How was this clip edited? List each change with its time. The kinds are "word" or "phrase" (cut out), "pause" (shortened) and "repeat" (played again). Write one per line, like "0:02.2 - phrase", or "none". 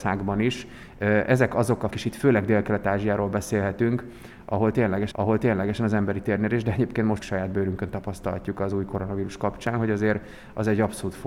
0:01.9 - phrase
0:05.1 - repeat
0:07.2 - phrase